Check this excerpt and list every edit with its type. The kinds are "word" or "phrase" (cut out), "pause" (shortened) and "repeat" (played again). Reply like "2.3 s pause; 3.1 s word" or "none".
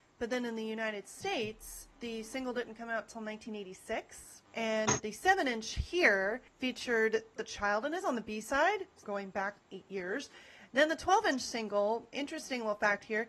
1.9 s pause; 4.5 s pause; 6.5 s pause; 7.4 s phrase; 8.0 s word; 9.0 s phrase; 9.6 s word; 12.1 s word